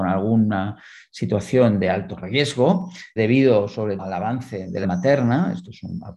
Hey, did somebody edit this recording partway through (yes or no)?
yes